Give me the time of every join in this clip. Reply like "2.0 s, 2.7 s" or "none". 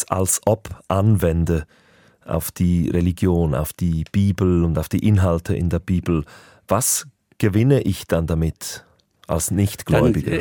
none

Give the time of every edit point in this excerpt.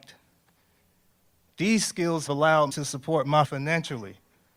2.3 s, 2.7 s, 3.4 s

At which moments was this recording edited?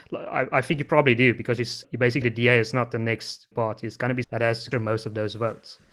1.8 s, 2.2 s, 3.5 s, 4.2 s, 4.7 s

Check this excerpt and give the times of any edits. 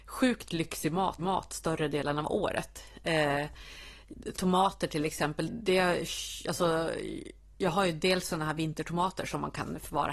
1.2 s, 5.5 s, 7.5 s

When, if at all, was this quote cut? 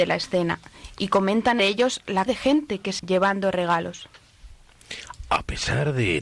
1.6 s, 2.3 s, 3.0 s

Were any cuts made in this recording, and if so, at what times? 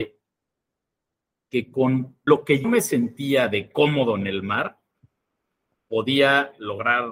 2.3 s, 2.6 s

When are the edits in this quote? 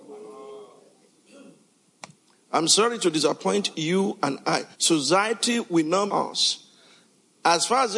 4.7 s, 6.1 s

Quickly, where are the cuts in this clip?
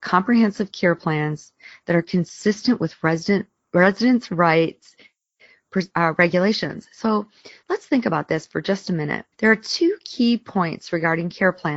3.6 s, 9.3 s

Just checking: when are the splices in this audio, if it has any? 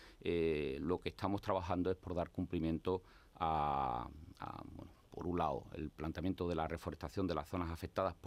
none

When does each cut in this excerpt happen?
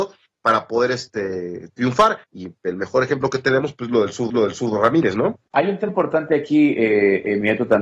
2.2 s, 4.3 s, 5.5 s, 5.9 s

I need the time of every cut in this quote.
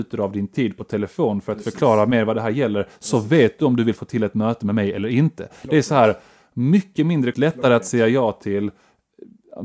7.3 s

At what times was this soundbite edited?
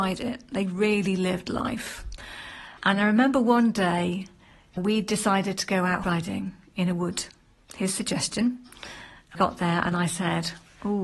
2.8 s, 4.8 s, 6.0 s, 7.6 s, 9.3 s

